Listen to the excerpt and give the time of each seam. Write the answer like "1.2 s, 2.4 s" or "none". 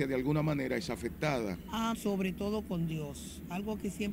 1.9 s